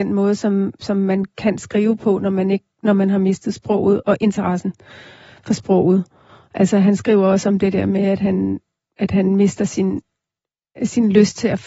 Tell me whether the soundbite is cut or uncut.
uncut